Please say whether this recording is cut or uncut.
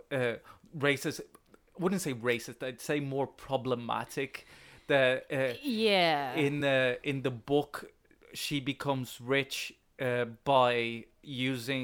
uncut